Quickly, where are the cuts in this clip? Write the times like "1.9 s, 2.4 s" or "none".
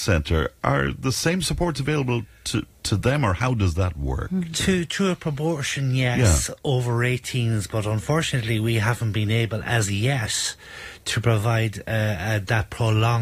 none